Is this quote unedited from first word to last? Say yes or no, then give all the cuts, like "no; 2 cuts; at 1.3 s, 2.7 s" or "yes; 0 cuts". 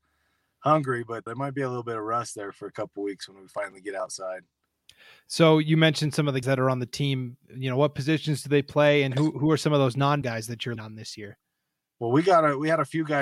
no; 4 cuts; at 1.3 s, 6.4 s, 10.2 s, 10.8 s